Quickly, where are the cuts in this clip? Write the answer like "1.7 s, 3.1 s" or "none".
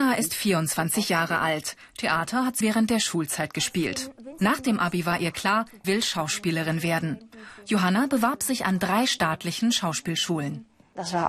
2.6 s, 5.8 s